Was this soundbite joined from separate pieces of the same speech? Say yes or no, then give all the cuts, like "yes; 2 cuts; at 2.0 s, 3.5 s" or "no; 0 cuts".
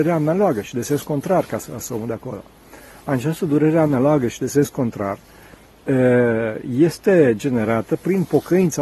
no; 0 cuts